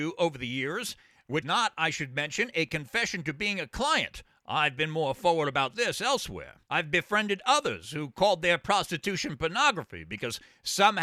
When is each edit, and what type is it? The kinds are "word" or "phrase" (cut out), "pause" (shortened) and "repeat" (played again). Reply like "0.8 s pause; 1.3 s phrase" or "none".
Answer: 1.4 s word; 6.7 s pause